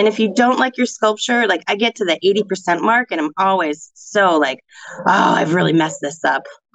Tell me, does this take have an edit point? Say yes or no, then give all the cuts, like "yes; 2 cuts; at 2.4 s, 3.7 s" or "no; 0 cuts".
no; 0 cuts